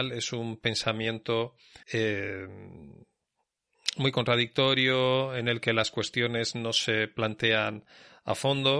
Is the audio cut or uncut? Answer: cut